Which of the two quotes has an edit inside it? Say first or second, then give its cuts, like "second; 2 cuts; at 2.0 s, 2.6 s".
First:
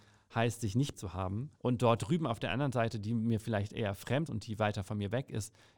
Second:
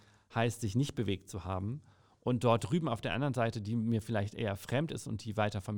first; 3 cuts; at 0.9 s, 1.6 s, 4.3 s